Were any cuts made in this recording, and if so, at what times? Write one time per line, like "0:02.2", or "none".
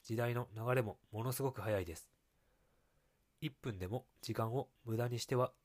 none